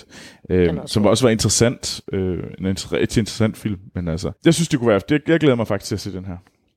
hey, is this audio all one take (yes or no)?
no